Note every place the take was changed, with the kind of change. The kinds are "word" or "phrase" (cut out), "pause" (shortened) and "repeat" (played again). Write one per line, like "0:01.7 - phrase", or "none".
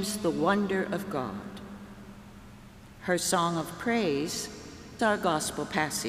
0:05.0 - word

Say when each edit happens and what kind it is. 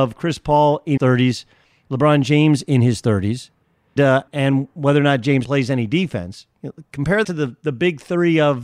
0:01.0 - word
0:04.0 - word
0:04.3 - word
0:05.4 - word
0:07.2 - word

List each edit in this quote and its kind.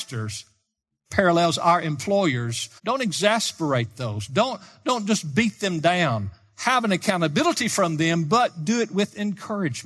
0:02.8 - pause

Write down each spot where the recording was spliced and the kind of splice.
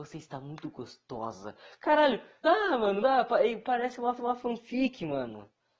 0:02.4 - word
0:03.0 - word
0:04.2 - repeat

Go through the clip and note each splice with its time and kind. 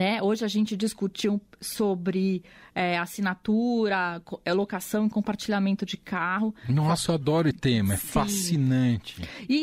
0:07.5 - word

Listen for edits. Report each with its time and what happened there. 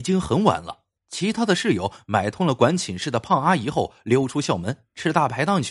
0:01.0 - pause

